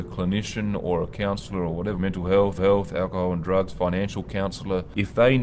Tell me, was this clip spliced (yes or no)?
yes